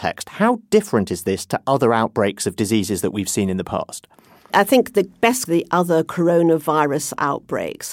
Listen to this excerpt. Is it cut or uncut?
cut